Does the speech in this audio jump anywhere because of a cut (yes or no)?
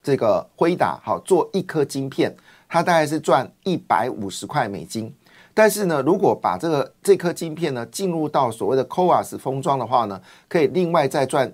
no